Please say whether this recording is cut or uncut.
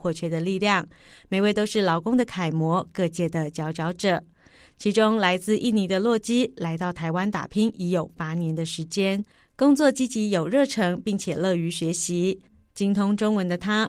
uncut